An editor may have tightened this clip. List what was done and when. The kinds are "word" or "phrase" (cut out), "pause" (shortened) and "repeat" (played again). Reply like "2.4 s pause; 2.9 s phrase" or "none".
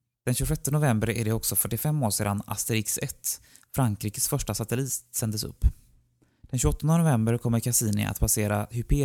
none